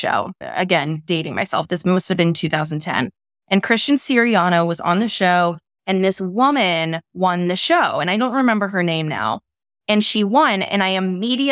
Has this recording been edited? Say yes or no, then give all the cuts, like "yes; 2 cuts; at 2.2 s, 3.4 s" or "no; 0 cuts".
no; 0 cuts